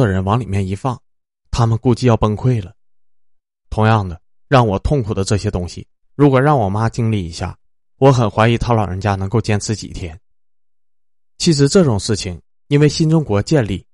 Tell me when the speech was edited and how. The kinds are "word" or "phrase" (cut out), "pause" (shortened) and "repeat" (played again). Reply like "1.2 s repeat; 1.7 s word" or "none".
none